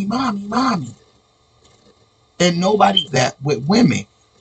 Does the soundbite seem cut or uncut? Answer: cut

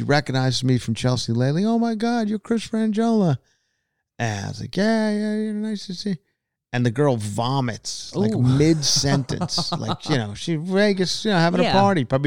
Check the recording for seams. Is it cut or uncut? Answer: uncut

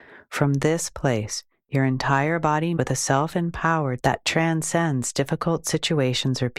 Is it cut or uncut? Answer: cut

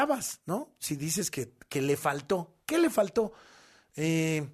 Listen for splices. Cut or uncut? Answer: uncut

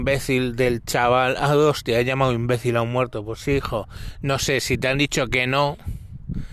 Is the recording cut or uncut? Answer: uncut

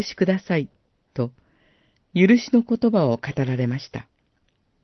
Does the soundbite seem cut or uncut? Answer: uncut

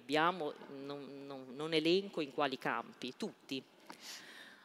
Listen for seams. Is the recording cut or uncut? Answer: uncut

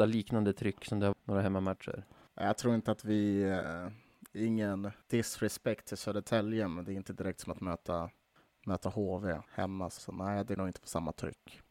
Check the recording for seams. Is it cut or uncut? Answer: cut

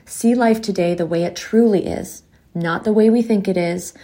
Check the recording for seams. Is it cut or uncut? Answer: uncut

